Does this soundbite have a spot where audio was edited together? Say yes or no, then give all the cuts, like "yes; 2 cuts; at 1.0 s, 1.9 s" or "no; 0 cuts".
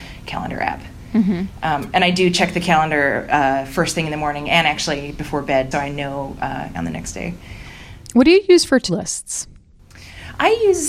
yes; 3 cuts; at 5.7 s, 6.7 s, 8.9 s